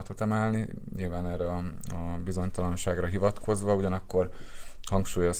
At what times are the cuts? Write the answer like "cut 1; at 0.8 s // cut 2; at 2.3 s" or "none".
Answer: none